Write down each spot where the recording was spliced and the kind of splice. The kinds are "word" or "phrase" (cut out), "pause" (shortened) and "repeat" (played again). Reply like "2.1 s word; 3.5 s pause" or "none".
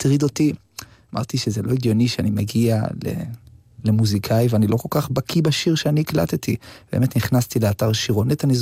none

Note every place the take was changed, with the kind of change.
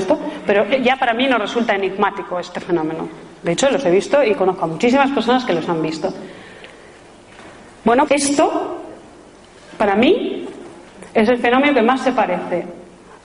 8.1 s word

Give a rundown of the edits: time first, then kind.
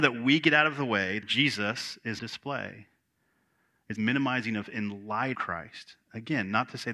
1.2 s word; 2.2 s word; 4.0 s word; 4.6 s word; 5.3 s word

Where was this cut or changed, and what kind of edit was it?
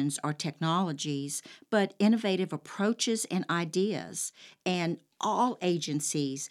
none

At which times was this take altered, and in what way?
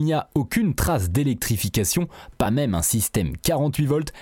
none

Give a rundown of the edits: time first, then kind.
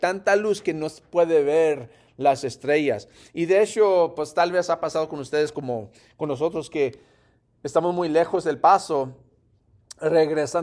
none

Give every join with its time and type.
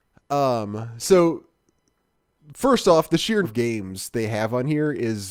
3.4 s word

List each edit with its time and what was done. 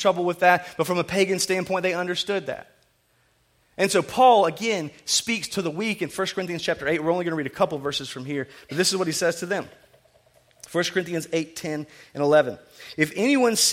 none

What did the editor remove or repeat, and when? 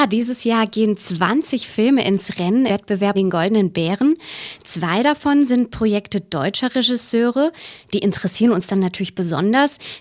2.7 s word; 3.1 s word

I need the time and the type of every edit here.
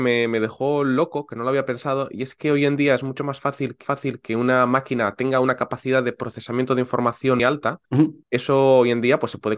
3.8 s repeat; 7.4 s word; 7.9 s pause; 8.2 s pause

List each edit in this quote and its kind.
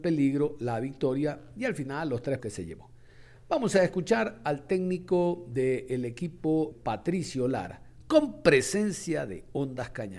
2.4 s word; 6.7 s phrase

